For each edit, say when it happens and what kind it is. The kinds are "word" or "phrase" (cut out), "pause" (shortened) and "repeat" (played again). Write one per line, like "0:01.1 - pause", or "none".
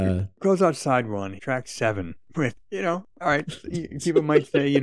0:01.4 - word